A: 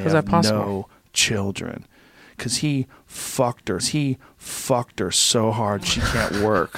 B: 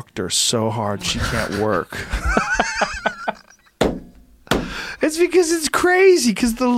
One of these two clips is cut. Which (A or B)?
A